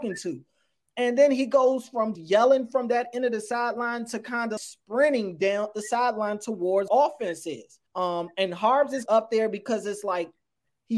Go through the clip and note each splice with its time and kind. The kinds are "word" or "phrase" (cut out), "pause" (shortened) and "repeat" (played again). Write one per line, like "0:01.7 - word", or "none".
0:02.1 - word
0:04.6 - word
0:05.7 - word
0:06.9 - phrase
0:07.9 - pause
0:09.1 - phrase